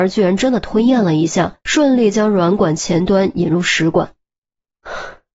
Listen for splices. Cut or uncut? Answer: cut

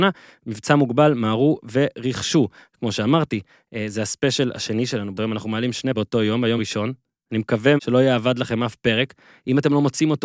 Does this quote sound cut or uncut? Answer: cut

